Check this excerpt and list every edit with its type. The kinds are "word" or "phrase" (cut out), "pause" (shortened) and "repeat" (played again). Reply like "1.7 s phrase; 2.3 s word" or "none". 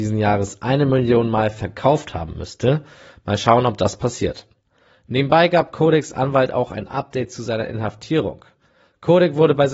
none

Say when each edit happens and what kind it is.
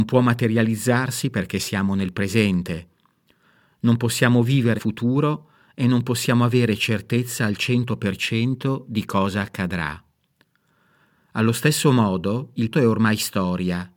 4.8 s word; 12.7 s word

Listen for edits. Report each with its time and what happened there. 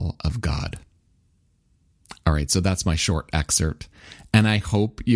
none

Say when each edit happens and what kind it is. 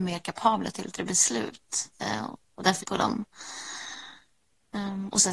1.0 s word; 2.8 s phrase

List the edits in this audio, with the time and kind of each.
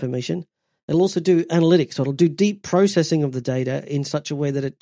none

